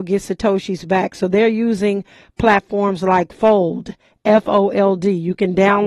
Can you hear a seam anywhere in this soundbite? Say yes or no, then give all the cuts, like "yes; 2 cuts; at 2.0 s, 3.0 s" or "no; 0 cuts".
no; 0 cuts